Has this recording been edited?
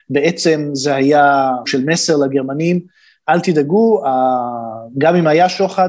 yes; 1 cut; at 1.6 s

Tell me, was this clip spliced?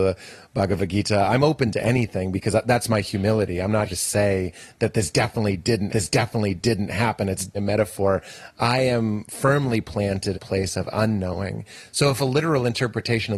yes; 4 cuts; at 3.9 s, 5.9 s, 7.6 s, 10.3 s

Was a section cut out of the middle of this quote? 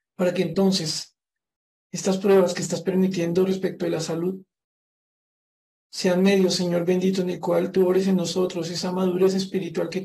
no; 0 cuts

